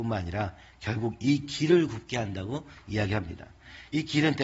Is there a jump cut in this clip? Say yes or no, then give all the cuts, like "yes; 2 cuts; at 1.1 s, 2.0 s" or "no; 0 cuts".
no; 0 cuts